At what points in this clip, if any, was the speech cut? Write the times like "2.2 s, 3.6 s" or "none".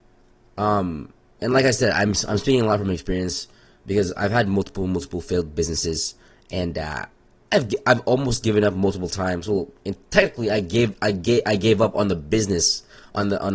none